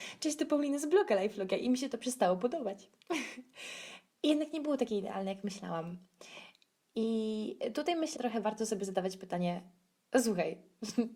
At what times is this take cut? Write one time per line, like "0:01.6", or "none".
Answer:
0:08.2